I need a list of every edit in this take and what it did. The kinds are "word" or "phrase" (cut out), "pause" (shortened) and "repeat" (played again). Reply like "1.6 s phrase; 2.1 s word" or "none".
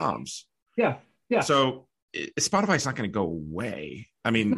none

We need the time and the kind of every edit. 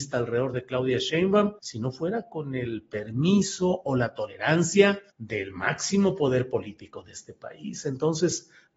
1.6 s pause; 5.1 s pause

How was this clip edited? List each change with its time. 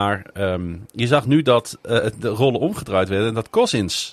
none

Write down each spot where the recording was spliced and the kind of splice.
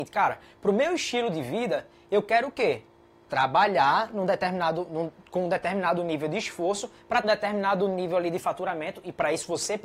7.2 s word

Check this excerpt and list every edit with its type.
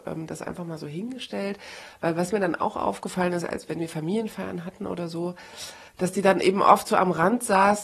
5.9 s pause

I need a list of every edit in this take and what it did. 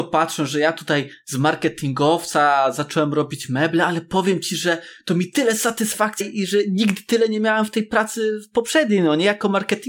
6.2 s word

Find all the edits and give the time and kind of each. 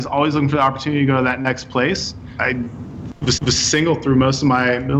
3.3 s repeat

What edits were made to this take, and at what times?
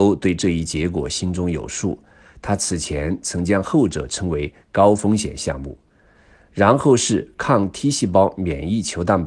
none

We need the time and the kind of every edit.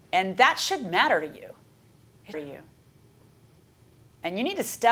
2.3 s phrase

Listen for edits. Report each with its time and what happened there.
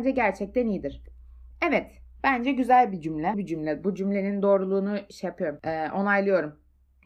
3.3 s word

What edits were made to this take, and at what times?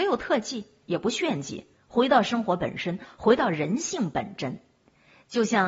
none

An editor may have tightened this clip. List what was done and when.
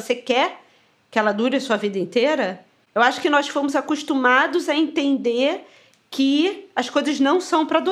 none

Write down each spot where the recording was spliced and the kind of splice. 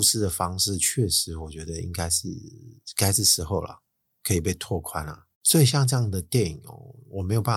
5.3 s pause

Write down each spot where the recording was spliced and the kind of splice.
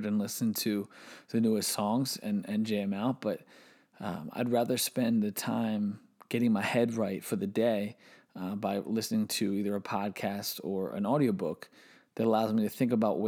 none

